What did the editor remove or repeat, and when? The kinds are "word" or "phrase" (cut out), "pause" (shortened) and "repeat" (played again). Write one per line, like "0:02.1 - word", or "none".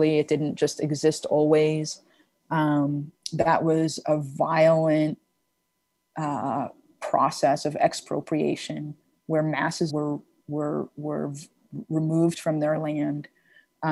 0:09.9 - phrase